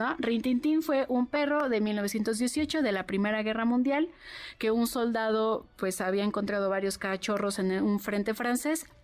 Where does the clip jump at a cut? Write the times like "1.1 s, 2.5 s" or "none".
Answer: none

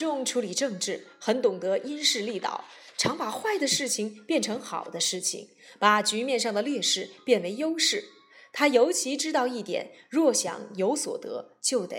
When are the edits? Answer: none

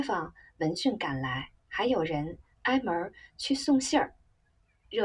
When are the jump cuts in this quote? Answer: 1.6 s

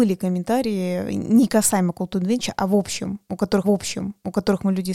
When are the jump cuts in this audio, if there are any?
3.6 s

